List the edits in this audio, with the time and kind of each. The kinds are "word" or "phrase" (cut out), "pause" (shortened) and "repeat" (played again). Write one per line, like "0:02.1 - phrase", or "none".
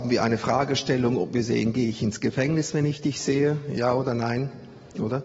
none

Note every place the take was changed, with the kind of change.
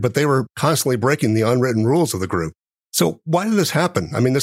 none

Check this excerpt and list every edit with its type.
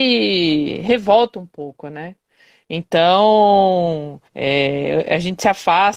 0:04.3 - pause

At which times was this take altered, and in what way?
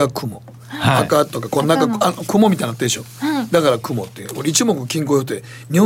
none

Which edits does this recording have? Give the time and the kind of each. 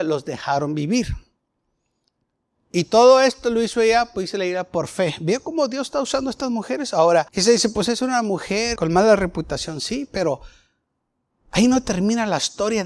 0:07.3 - pause
0:08.8 - word

